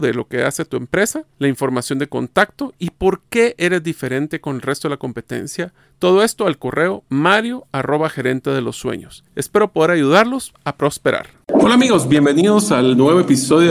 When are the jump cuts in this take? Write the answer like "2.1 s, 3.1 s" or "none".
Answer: 5.8 s, 9.3 s, 11.4 s